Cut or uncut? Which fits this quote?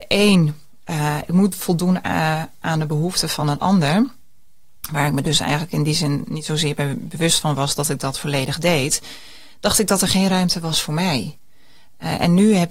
uncut